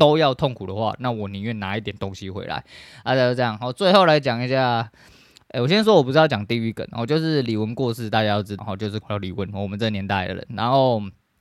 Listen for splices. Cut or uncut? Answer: cut